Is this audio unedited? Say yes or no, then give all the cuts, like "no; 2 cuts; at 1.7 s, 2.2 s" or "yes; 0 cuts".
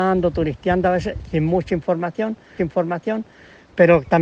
no; 1 cut; at 2.6 s